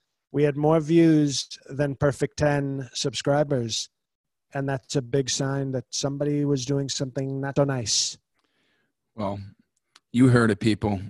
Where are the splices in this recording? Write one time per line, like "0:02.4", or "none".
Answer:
0:01.6
0:07.6